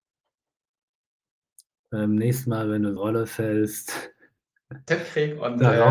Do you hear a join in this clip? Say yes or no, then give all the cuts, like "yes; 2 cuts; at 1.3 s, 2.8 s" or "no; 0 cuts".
yes; 2 cuts; at 3.0 s, 4.9 s